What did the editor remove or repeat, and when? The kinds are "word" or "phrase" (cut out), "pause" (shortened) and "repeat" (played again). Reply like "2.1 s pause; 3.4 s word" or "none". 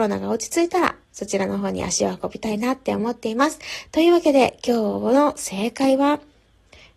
1.0 s pause